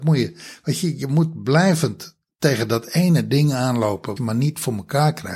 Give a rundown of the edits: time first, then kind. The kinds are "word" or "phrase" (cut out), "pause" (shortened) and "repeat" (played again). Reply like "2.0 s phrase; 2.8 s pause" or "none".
4.2 s word